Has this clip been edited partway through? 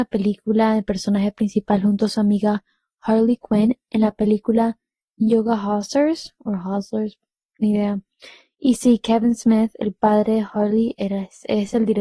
no; 0 cuts

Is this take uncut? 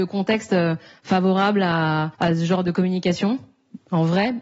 no; 1 cut; at 2.1 s

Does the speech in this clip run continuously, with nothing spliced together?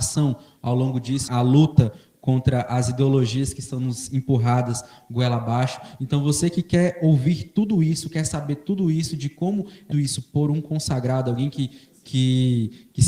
no; 2 cuts; at 1.3 s, 9.9 s

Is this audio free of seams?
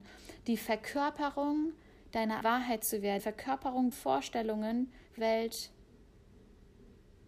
no; 4 cuts; at 2.4 s, 3.2 s, 3.9 s, 5.2 s

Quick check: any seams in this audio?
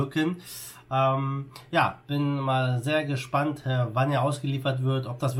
no; 0 cuts

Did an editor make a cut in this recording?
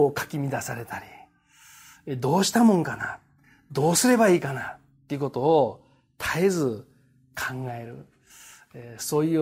no; 0 cuts

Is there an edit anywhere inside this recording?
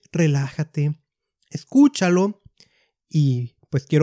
no; 0 cuts

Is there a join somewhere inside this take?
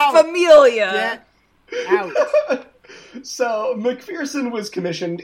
no; 0 cuts

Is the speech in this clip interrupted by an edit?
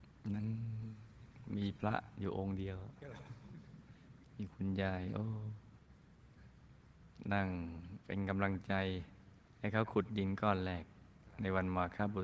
yes; 2 cuts; at 8.0 s, 9.4 s

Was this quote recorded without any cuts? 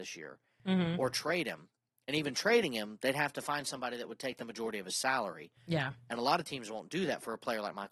yes; 0 cuts

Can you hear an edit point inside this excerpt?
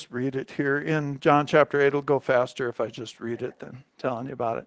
no; 0 cuts

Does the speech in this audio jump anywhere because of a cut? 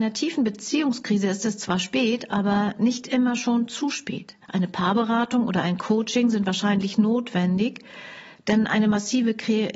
yes; 1 cut; at 4.4 s

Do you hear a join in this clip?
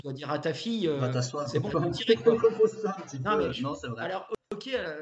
yes; 1 cut; at 1.7 s

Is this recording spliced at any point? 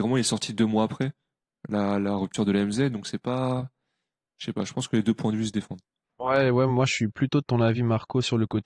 no; 0 cuts

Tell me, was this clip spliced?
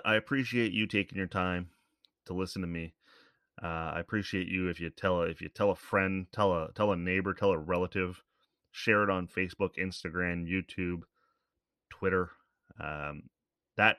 no; 0 cuts

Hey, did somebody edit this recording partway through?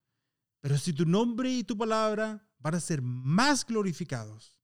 no; 0 cuts

